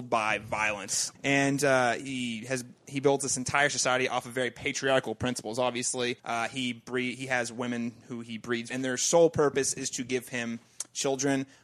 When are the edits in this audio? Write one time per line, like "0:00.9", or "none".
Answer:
0:06.2
0:08.7